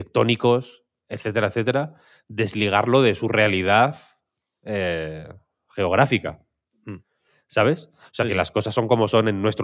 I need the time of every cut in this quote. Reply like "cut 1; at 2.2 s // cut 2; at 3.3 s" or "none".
none